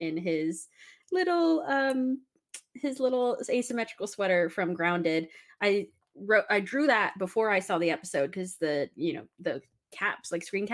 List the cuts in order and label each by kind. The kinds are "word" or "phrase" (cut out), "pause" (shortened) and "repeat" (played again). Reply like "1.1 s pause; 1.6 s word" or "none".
none